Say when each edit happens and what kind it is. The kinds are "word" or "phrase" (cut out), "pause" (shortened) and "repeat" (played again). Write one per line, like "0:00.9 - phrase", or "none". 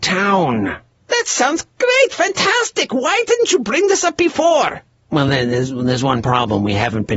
none